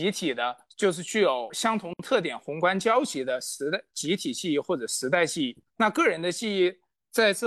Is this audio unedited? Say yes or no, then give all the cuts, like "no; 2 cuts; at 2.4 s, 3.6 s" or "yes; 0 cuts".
no; 1 cut; at 5.7 s